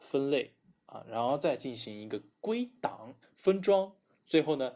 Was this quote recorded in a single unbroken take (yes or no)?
no